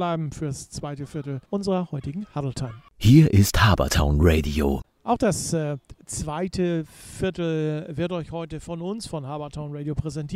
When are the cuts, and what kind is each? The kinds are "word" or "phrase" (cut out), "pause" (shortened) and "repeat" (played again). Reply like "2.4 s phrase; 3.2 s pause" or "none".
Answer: 1.4 s pause